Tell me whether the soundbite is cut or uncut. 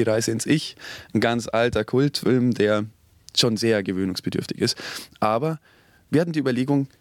uncut